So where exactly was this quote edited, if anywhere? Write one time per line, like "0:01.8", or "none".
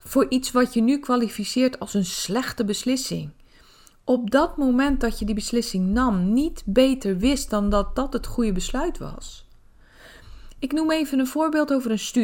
none